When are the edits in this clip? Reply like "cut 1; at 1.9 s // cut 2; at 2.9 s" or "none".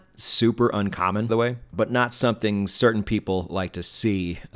cut 1; at 1.3 s // cut 2; at 1.7 s